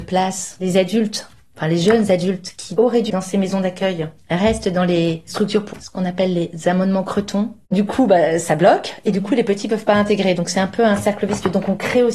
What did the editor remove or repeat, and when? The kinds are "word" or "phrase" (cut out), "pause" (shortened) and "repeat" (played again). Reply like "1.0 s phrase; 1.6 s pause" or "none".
3.1 s word; 5.7 s word